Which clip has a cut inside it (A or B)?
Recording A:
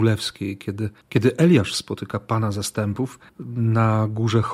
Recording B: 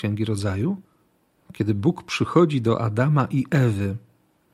A